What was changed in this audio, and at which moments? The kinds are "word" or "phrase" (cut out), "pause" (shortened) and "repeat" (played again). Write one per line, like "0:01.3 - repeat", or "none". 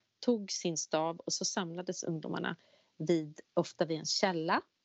none